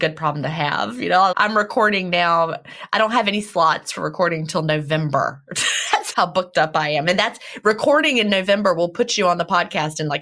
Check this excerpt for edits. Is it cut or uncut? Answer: cut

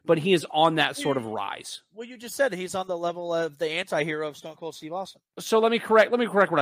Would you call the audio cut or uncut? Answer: cut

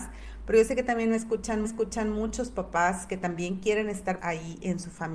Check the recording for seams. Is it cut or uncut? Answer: cut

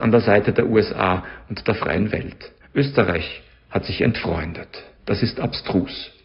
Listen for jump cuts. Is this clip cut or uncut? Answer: cut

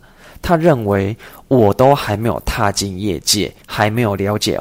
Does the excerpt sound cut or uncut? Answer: cut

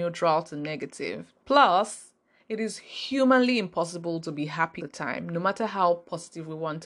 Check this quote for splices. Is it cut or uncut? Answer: cut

